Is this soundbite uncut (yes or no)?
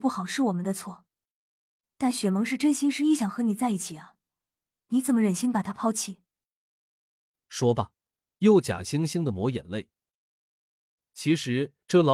yes